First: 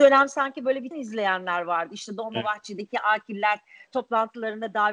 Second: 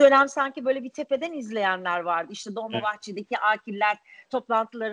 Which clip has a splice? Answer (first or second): first